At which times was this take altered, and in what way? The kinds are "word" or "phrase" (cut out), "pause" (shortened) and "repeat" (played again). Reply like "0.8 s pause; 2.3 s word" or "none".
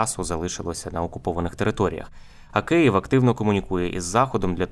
none